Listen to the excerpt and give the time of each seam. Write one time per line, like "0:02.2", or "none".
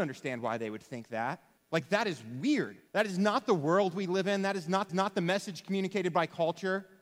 0:01.6
0:02.9
0:04.9